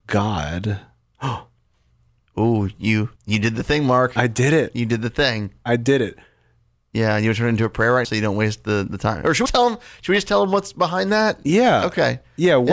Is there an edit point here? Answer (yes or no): yes